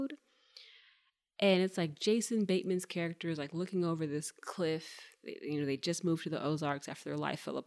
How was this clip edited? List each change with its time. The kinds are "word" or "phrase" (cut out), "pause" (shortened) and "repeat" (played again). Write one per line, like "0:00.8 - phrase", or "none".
none